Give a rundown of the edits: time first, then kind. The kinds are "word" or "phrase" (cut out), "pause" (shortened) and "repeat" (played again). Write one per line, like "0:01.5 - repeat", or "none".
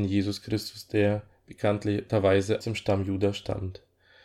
0:02.6 - word